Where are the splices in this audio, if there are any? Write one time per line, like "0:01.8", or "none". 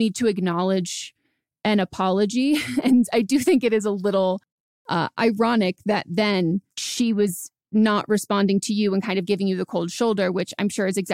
0:06.7